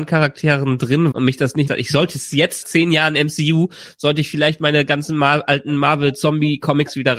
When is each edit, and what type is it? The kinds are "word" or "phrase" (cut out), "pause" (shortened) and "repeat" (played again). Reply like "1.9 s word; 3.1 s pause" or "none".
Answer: 1.1 s word; 1.7 s phrase; 2.6 s phrase